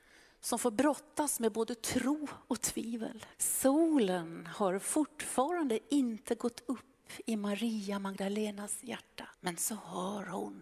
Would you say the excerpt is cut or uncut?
cut